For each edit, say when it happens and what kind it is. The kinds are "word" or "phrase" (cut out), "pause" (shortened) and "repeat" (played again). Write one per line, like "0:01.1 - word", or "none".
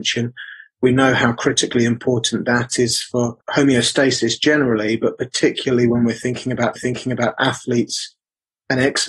0:03.4 - pause
0:06.8 - repeat